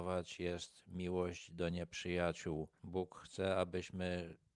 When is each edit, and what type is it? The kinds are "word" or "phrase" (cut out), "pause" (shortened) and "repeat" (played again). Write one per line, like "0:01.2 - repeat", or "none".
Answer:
none